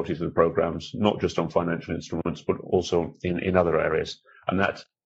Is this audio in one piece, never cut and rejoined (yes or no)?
yes